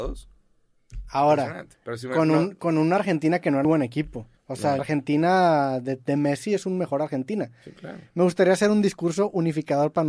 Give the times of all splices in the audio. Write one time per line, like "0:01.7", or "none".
0:01.7
0:03.6
0:04.4
0:04.8